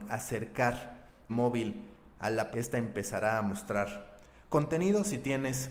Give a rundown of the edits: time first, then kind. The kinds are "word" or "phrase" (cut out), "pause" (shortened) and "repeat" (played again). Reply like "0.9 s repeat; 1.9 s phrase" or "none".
1.3 s word; 2.5 s word